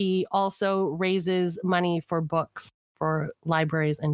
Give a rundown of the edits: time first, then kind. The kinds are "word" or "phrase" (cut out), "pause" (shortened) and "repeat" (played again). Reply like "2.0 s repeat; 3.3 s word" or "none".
none